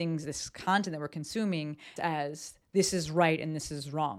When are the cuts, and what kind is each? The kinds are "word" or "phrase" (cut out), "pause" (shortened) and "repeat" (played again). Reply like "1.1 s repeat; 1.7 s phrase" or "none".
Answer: 2.0 s phrase